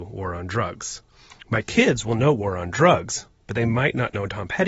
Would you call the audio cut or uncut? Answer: uncut